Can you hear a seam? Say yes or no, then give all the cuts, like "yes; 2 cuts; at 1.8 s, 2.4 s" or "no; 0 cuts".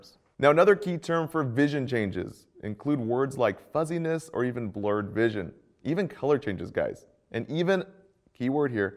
no; 0 cuts